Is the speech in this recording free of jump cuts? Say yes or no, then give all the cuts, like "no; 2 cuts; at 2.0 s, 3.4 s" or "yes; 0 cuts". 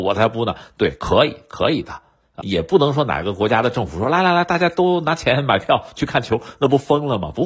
yes; 0 cuts